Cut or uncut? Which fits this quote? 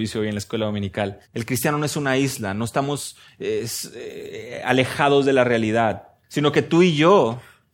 cut